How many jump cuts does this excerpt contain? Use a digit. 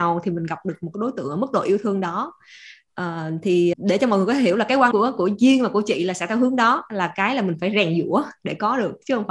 2